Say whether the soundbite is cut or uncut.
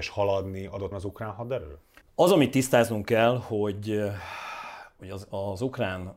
cut